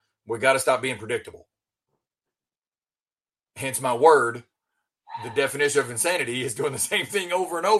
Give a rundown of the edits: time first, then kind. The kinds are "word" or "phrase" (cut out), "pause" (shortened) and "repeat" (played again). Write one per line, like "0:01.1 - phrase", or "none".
none